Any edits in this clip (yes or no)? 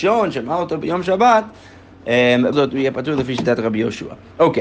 yes